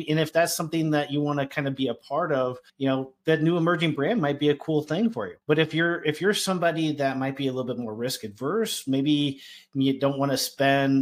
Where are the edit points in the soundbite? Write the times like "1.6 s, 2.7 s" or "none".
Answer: 2.7 s, 5.4 s